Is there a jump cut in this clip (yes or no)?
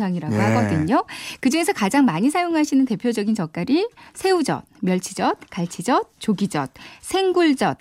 no